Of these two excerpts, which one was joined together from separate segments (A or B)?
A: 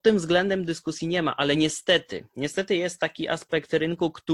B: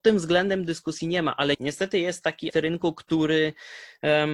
B